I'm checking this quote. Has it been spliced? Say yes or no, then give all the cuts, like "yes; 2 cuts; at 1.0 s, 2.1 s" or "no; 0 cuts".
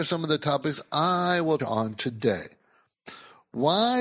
yes; 1 cut; at 1.6 s